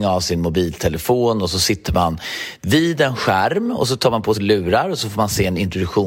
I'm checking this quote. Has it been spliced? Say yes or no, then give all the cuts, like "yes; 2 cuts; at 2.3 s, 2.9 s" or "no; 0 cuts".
yes; 1 cut; at 4.3 s